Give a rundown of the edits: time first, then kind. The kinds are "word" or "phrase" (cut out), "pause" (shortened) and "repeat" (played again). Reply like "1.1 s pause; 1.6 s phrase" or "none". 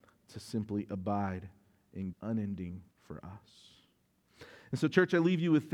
2.1 s word; 2.9 s word